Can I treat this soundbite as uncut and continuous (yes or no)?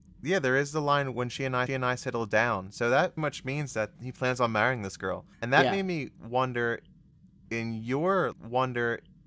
no